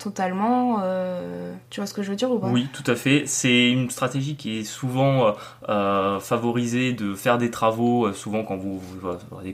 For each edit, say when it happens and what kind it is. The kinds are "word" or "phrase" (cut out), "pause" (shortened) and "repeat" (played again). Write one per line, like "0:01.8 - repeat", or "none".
0:01.7 - pause